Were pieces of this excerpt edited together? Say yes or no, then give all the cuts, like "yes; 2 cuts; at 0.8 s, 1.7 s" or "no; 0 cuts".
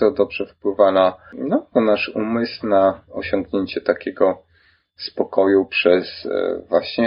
no; 0 cuts